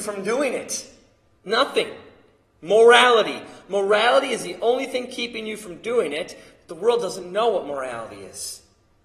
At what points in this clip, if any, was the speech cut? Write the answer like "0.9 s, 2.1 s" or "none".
none